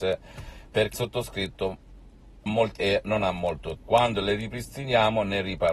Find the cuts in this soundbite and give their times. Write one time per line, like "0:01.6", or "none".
0:00.9
0:02.5
0:02.8
0:03.8